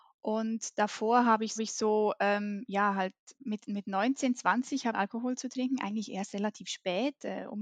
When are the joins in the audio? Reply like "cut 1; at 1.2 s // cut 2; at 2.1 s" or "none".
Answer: cut 1; at 1.6 s // cut 2; at 3.3 s // cut 3; at 4.9 s